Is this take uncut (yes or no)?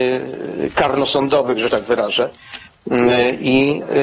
no